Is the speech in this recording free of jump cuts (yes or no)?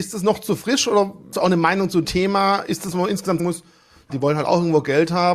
no